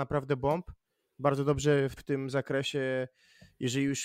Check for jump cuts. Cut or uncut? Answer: cut